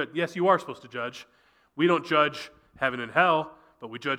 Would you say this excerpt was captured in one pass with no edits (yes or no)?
yes